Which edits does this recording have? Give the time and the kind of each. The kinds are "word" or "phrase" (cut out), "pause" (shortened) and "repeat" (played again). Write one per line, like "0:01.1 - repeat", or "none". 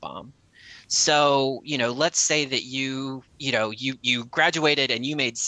0:03.3 - pause